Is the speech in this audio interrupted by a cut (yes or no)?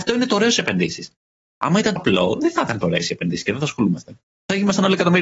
yes